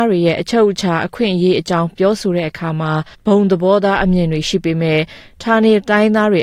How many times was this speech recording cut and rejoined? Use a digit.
1